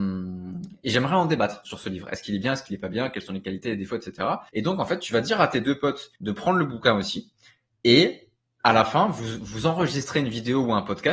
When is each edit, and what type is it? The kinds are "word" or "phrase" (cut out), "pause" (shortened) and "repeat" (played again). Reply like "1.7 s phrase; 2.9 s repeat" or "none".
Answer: 4.5 s pause; 6.2 s pause